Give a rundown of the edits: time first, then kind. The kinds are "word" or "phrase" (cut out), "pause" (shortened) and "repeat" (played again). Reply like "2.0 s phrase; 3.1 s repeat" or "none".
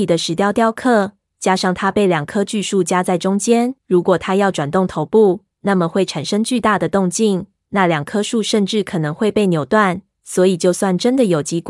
3.8 s pause

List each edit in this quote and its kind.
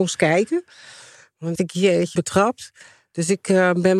1.6 s word; 2.2 s word

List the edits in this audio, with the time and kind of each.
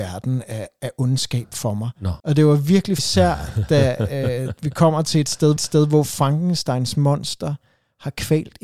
2.2 s pause; 3.0 s word; 5.6 s repeat

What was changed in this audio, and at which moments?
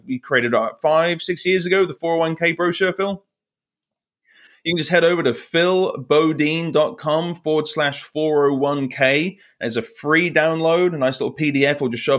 none

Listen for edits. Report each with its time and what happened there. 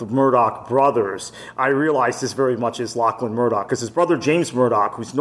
none

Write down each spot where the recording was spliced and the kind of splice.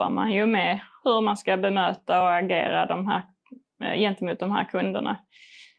none

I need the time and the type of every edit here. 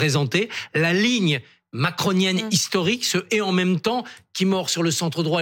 none

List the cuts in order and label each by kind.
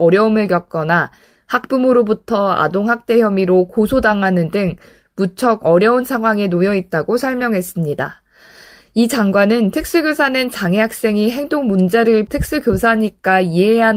12.3 s word

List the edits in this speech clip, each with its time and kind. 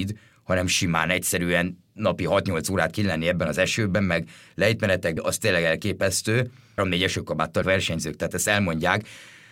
5.2 s word; 6.8 s word; 7.6 s word

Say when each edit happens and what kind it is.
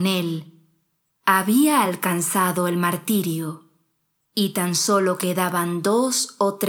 none

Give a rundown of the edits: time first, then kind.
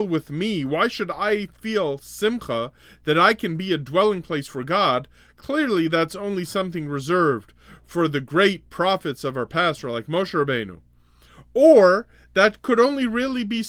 none

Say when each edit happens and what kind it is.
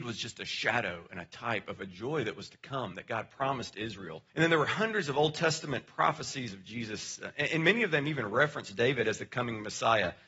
4.3 s pause

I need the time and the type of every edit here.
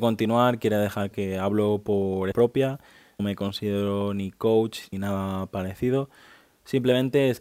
1.1 s word; 2.3 s word; 3.2 s word; 4.9 s word

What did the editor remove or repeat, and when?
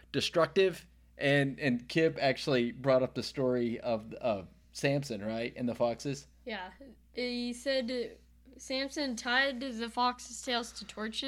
none

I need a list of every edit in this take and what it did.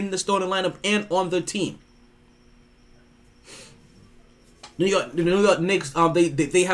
4.7 s pause

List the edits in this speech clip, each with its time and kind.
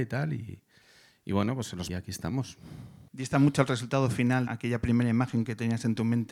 1.9 s phrase; 3.1 s pause; 4.5 s word

